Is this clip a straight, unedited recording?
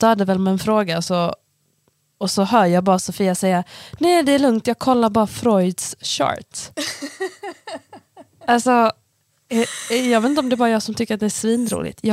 yes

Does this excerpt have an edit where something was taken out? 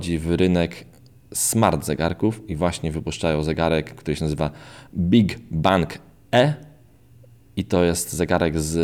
no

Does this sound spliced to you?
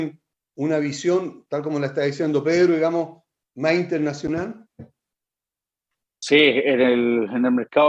no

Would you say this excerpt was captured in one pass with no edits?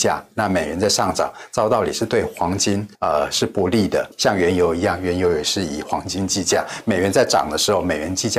no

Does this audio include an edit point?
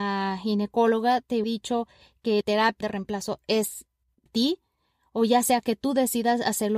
yes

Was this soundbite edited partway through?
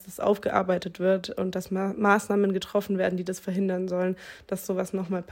no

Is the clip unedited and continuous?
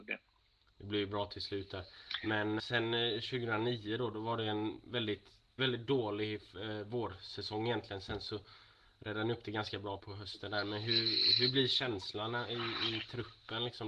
no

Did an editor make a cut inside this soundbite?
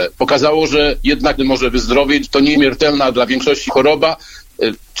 yes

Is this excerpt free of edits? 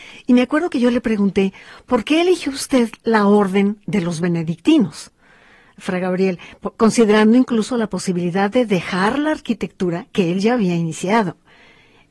yes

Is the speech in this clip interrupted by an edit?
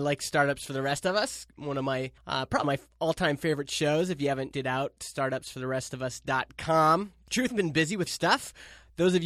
yes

